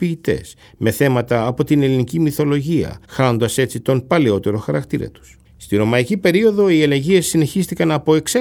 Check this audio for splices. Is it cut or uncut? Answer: cut